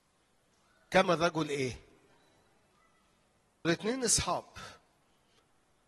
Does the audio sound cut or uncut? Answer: cut